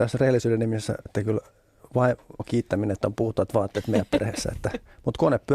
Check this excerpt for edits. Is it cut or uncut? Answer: cut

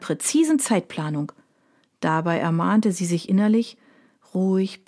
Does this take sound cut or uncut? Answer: uncut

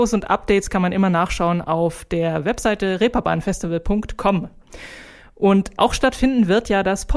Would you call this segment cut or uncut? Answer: uncut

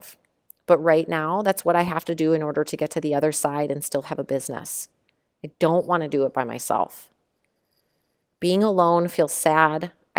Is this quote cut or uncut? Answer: uncut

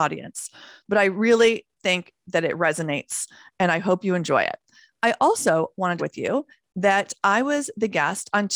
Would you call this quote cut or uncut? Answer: cut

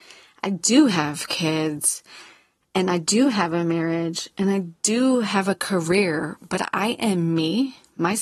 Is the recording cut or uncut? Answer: uncut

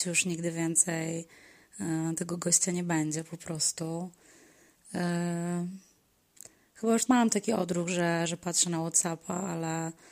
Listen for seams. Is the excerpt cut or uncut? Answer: cut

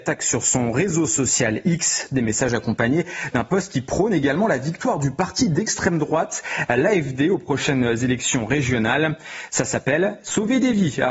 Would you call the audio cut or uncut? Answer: uncut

